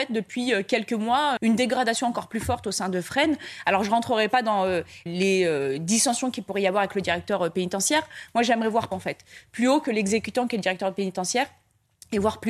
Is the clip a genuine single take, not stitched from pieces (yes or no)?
no